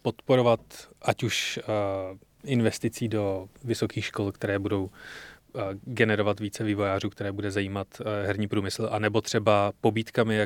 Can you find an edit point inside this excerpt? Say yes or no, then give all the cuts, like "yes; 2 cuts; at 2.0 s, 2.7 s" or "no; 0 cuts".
no; 0 cuts